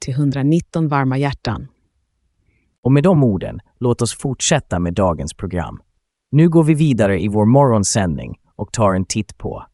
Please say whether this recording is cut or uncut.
uncut